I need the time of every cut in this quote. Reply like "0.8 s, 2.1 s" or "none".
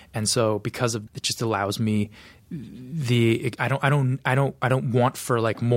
1.1 s